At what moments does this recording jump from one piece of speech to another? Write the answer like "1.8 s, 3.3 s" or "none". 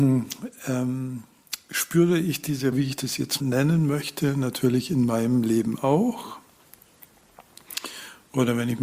2.7 s, 3.4 s